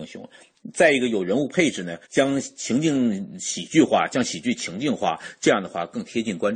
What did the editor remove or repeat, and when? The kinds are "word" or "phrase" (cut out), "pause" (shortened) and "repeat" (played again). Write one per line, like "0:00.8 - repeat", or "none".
0:02.0 - pause